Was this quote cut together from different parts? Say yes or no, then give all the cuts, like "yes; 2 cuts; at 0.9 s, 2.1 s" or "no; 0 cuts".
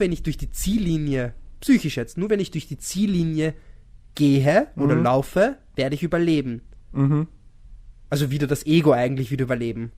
no; 0 cuts